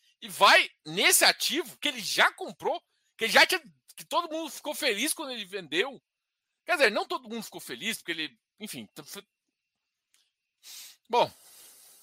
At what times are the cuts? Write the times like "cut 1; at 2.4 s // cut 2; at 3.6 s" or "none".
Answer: none